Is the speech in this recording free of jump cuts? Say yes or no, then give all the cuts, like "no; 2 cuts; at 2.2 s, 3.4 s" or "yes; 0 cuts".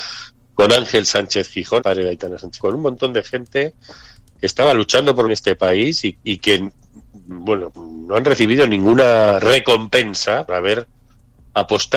no; 6 cuts; at 1.8 s, 2.6 s, 5.3 s, 6.1 s, 7.7 s, 10.5 s